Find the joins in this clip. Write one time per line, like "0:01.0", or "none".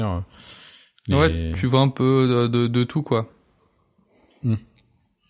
none